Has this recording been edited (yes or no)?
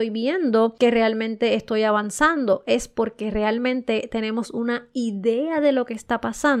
no